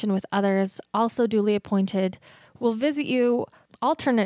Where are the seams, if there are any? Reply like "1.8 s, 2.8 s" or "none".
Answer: none